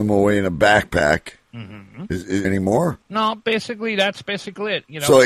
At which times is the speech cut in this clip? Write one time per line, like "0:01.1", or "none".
0:01.4
0:02.4
0:03.0